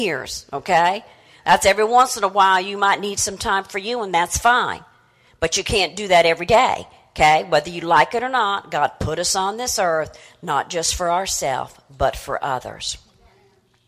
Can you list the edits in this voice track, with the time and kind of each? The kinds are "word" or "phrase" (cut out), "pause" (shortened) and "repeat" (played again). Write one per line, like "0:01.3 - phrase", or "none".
none